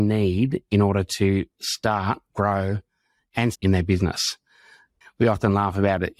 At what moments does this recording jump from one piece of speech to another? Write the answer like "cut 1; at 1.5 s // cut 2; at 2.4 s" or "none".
cut 1; at 3.5 s